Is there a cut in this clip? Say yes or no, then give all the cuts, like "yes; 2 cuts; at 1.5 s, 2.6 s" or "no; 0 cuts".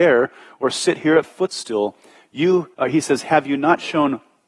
yes; 2 cuts; at 1.2 s, 2.7 s